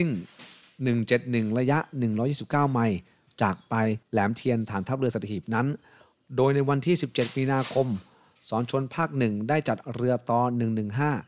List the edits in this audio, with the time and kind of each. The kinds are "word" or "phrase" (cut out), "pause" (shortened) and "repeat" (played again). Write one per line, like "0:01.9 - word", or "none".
none